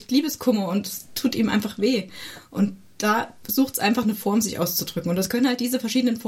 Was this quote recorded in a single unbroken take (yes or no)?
yes